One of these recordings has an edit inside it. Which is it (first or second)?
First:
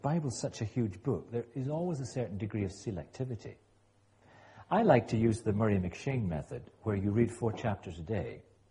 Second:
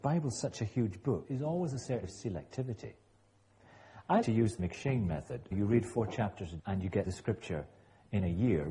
second